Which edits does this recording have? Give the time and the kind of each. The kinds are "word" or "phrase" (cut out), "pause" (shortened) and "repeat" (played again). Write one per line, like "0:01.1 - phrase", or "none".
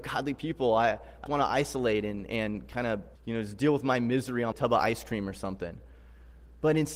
0:01.3 - word
0:03.1 - pause
0:04.5 - phrase